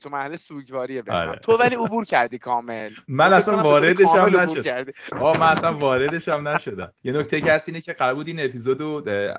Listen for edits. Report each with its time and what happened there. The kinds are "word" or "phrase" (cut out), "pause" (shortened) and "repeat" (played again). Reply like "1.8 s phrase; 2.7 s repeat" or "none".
7.0 s pause